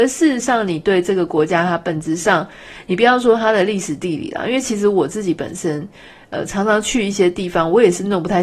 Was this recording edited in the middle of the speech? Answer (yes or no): no